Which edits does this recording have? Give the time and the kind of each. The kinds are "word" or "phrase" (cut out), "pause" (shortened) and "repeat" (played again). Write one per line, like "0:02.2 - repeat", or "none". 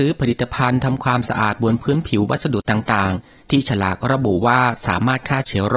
none